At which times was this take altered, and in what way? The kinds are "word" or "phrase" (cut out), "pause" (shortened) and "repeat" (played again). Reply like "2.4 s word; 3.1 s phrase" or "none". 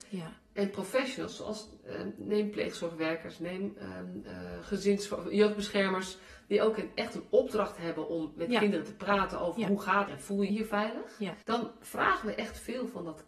10.1 s phrase; 10.5 s phrase; 11.4 s pause